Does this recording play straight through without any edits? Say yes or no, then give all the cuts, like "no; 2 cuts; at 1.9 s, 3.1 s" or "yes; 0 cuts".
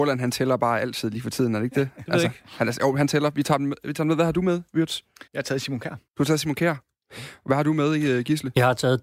no; 2 cuts; at 5.3 s, 6.1 s